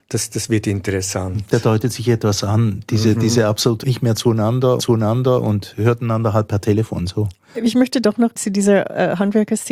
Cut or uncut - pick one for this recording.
cut